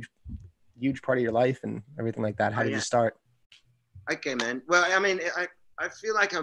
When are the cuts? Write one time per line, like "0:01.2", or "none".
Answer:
none